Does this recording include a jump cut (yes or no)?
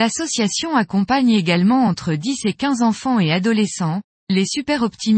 no